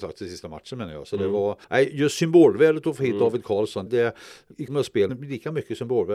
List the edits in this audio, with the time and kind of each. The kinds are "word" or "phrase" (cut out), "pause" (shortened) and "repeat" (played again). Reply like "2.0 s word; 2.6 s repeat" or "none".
1.6 s pause; 3.9 s word; 4.7 s word; 5.1 s word